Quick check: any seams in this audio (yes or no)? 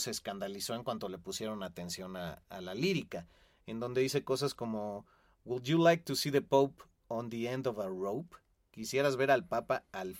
no